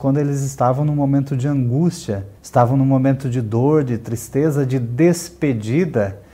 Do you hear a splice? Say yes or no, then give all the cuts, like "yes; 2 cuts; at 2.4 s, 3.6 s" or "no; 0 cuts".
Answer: yes; 1 cut; at 2.4 s